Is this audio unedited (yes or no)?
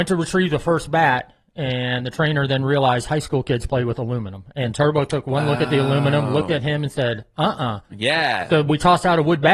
yes